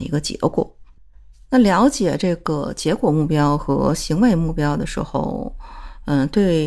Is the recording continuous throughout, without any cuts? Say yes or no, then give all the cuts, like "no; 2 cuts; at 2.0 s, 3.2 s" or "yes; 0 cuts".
yes; 0 cuts